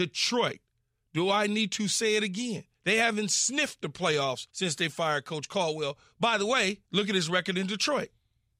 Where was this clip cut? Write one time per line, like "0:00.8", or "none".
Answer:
0:02.7
0:04.5
0:06.9